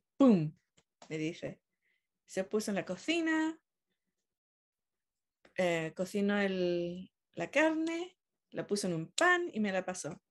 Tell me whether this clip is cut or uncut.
uncut